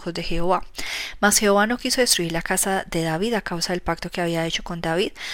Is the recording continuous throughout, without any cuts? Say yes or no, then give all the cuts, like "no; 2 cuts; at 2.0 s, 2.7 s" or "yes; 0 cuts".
yes; 0 cuts